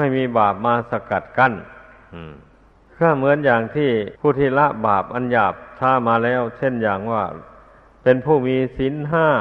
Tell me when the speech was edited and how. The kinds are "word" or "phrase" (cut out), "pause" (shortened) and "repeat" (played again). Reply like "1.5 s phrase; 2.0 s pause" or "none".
2.7 s pause; 4.2 s pause